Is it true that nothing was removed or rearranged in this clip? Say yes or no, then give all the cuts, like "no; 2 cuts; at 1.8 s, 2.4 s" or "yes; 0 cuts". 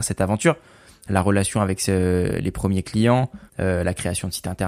no; 1 cut; at 3.5 s